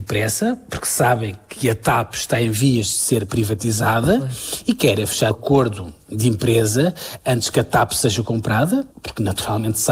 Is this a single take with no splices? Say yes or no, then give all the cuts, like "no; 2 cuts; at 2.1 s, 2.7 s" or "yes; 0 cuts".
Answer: no; 2 cuts; at 5.3 s, 8.9 s